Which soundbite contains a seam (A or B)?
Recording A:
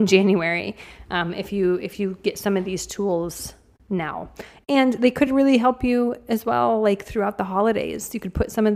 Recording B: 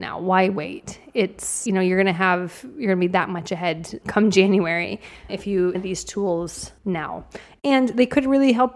B